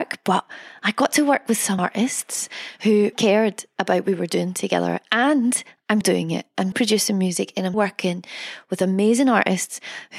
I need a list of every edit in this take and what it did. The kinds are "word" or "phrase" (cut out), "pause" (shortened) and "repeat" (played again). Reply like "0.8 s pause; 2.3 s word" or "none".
1.8 s word; 3.1 s word; 4.0 s word; 6.0 s word; 6.7 s word; 7.7 s word